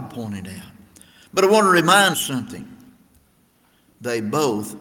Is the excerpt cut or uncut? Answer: cut